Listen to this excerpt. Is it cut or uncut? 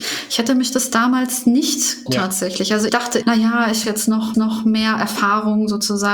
cut